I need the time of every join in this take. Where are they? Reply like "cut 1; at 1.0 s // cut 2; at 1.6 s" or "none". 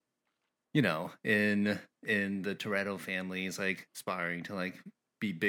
none